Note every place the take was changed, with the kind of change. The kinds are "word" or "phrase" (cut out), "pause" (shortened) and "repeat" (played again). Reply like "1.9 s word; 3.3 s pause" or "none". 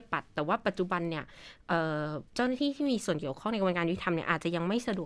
2.3 s pause